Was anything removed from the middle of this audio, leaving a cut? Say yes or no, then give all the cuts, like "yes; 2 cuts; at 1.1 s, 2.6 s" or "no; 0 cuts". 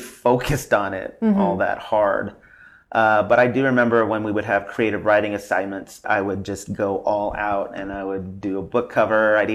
no; 0 cuts